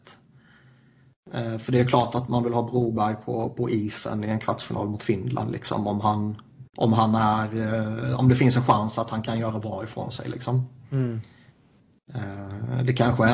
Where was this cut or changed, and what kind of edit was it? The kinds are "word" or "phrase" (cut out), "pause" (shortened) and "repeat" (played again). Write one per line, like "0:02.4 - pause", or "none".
0:06.7 - pause